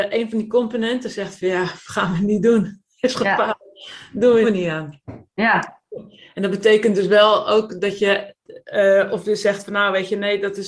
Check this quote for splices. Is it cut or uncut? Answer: cut